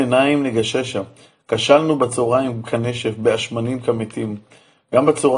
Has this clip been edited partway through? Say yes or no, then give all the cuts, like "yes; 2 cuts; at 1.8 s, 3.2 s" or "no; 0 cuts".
no; 0 cuts